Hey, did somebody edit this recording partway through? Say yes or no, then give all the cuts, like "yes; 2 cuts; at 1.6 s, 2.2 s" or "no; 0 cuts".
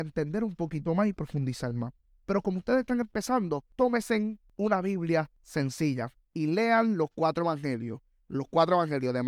no; 0 cuts